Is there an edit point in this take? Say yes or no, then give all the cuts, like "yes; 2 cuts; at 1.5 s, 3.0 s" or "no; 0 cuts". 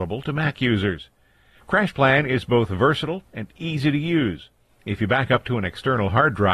no; 0 cuts